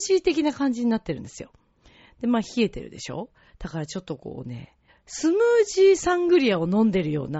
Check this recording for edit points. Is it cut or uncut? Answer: cut